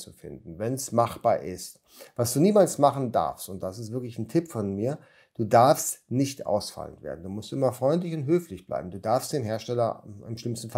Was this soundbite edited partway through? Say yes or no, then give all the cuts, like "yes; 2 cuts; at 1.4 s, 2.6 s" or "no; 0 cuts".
no; 0 cuts